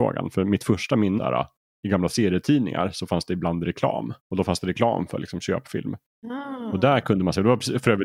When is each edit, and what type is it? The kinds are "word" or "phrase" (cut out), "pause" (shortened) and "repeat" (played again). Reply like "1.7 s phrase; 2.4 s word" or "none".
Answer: 1.2 s phrase; 1.6 s word; 4.2 s pause